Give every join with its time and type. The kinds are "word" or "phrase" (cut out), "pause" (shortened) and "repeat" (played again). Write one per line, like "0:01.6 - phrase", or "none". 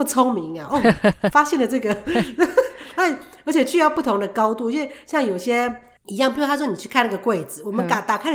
0:06.0 - word